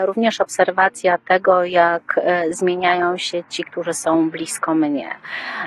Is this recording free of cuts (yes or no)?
yes